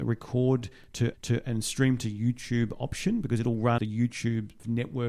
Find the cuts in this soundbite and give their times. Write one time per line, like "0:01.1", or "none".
0:01.1
0:03.8